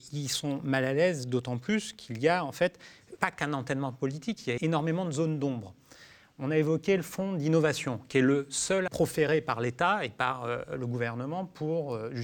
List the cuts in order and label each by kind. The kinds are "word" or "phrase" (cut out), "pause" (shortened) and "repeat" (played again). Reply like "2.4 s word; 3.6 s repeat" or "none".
3.2 s word; 4.6 s word; 8.9 s phrase

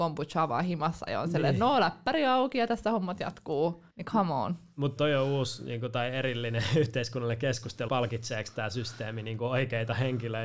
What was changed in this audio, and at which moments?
3.9 s pause; 5.0 s word; 7.9 s word

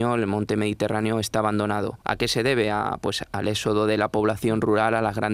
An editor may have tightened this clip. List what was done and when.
2.0 s pause

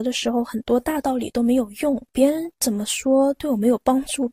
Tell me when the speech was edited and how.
2.1 s pause

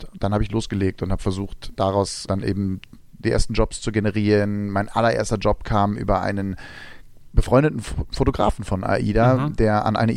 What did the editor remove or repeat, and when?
2.3 s word; 3.0 s word

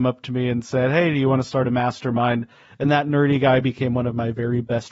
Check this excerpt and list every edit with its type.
none

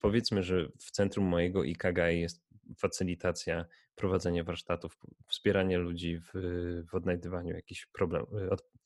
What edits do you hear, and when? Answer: none

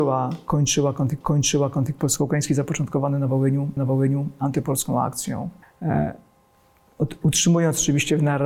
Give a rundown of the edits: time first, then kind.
1.2 s repeat; 3.8 s repeat; 5.6 s pause

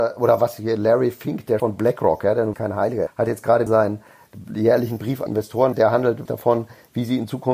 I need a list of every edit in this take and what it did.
1.6 s word; 2.5 s word; 3.1 s word; 3.7 s word; 5.3 s word; 5.7 s word; 6.3 s word

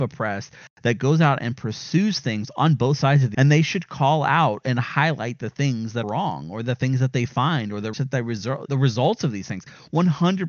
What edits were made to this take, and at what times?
3.3 s word; 6.0 s word; 7.9 s word; 8.6 s word

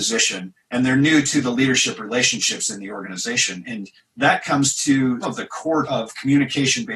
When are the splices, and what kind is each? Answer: 5.2 s word; 5.8 s word

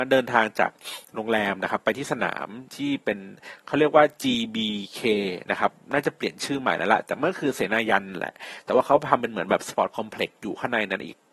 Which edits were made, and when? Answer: 2.7 s pause

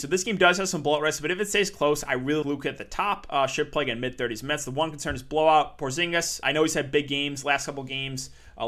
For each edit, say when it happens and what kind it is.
2.4 s word; 6.4 s word

